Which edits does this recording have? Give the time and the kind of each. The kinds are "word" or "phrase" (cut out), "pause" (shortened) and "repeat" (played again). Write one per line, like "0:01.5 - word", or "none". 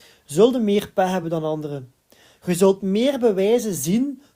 none